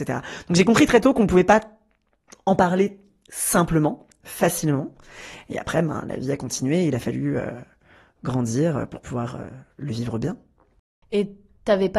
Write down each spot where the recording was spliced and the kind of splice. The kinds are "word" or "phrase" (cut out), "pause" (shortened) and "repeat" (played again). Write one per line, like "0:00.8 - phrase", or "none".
none